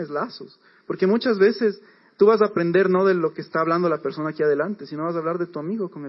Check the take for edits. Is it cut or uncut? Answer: uncut